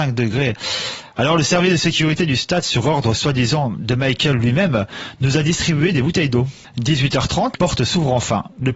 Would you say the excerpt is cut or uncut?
cut